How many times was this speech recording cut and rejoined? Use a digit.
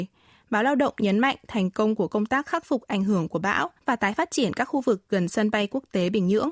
1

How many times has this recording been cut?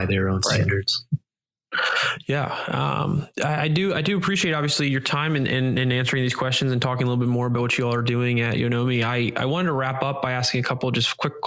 0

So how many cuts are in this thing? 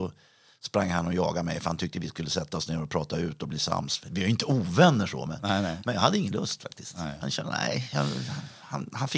0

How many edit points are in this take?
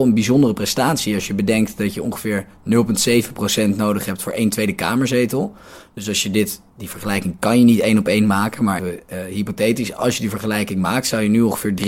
2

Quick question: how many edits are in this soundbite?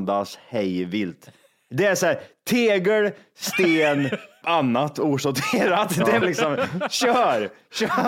2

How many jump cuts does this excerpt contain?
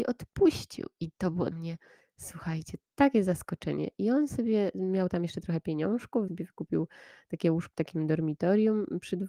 3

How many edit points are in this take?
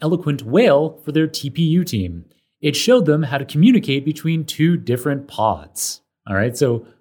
0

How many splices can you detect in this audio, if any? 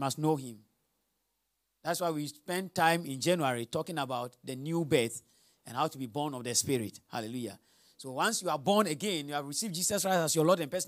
0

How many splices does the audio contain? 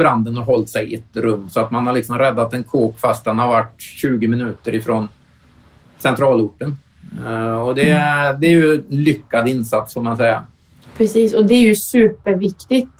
0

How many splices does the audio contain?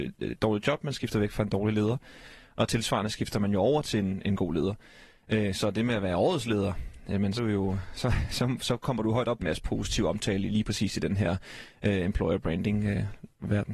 2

